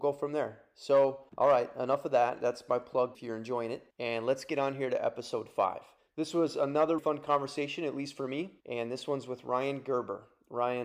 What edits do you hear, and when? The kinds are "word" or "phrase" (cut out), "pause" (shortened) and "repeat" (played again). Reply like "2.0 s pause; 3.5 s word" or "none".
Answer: 1.3 s pause; 3.1 s phrase; 3.9 s pause; 6.0 s pause; 7.0 s word; 8.6 s pause